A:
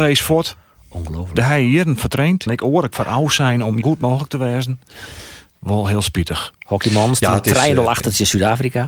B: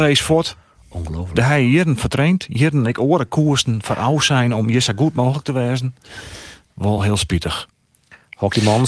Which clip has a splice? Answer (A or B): A